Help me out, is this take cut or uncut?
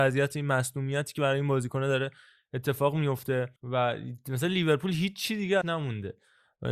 cut